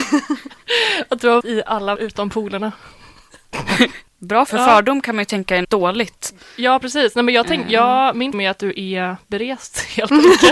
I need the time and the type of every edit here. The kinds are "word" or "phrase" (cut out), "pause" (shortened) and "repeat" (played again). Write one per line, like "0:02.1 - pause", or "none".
0:01.4 - word
0:02.0 - word
0:04.5 - word
0:05.6 - word
0:08.3 - word